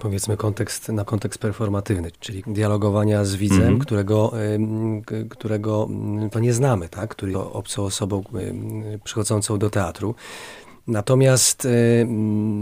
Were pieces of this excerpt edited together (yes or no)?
yes